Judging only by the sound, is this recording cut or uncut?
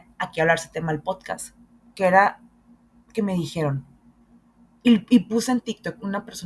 uncut